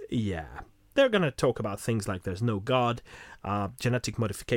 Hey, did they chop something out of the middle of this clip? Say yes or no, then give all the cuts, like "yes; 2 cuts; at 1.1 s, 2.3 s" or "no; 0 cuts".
no; 0 cuts